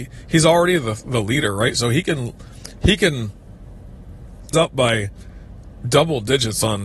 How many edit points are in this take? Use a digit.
1